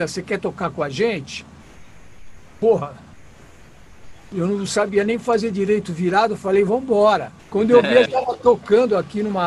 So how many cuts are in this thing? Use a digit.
2